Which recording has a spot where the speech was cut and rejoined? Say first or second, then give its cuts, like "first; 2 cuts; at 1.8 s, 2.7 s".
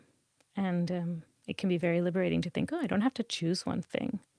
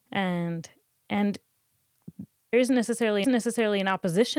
second; 2 cuts; at 2.5 s, 3.2 s